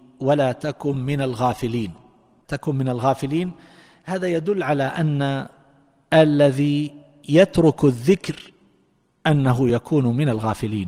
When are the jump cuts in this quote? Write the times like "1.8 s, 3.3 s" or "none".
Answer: none

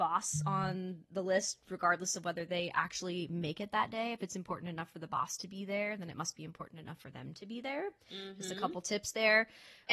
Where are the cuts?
none

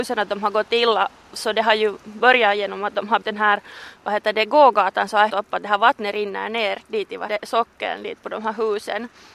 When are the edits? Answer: 3.2 s, 5.3 s, 7.3 s

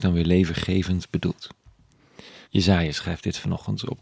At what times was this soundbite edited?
2.4 s

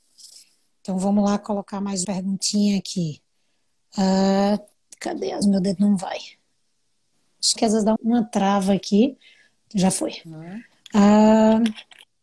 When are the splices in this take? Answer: 2.0 s, 5.4 s, 7.6 s, 8.0 s

